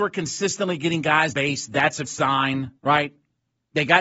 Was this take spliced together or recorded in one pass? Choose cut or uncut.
cut